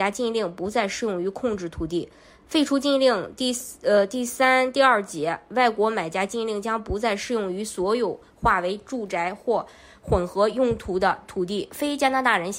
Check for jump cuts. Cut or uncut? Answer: uncut